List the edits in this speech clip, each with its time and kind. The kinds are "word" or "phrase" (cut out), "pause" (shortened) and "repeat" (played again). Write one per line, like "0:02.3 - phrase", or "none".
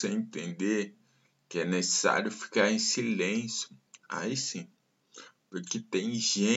none